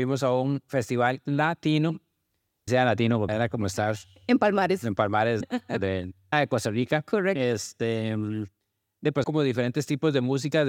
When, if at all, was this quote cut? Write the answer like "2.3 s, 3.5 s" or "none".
2.7 s, 3.3 s, 5.4 s, 6.3 s, 9.2 s